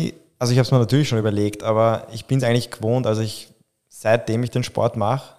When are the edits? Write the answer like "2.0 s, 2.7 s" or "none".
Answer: none